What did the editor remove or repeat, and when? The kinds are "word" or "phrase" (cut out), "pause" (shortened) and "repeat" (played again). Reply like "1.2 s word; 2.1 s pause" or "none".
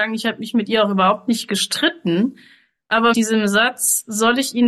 3.1 s word